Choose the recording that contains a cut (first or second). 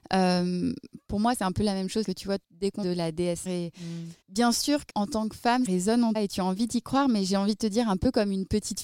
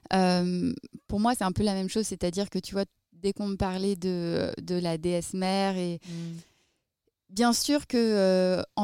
first